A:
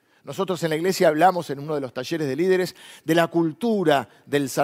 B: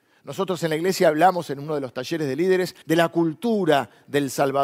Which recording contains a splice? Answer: B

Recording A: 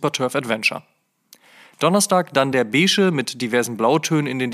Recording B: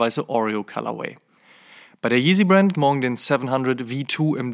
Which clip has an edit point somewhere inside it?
B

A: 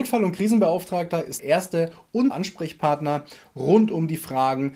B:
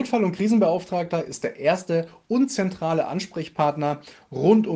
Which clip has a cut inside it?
A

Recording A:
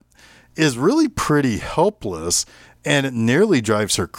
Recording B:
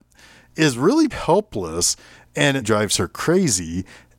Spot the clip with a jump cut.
B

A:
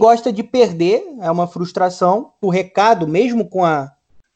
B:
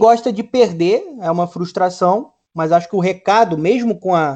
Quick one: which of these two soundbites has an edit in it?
A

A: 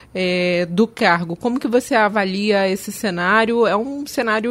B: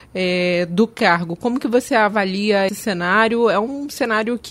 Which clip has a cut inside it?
B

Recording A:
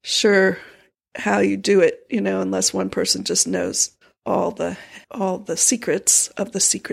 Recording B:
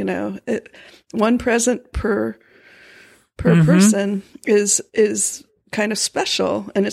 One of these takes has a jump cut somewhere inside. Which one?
A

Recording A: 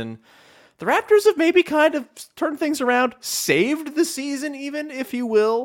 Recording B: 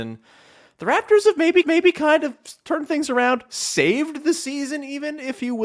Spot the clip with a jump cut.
B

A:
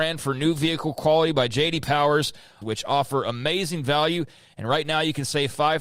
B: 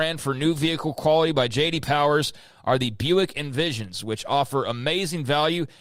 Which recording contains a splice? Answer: A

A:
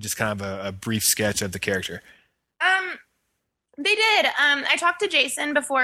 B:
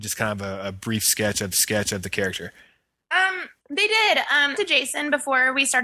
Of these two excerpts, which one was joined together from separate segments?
B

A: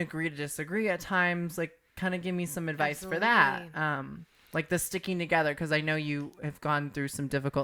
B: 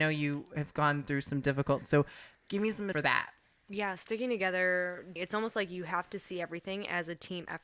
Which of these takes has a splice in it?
B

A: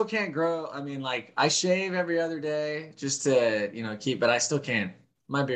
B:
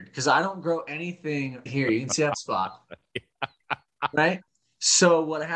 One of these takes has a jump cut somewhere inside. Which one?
B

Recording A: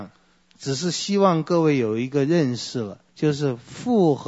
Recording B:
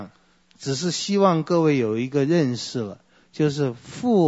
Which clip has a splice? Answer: A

